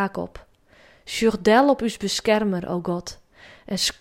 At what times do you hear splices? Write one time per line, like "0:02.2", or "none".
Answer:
none